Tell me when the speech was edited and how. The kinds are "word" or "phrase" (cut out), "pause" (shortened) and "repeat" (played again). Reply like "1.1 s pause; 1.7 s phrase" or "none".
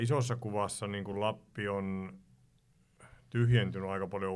none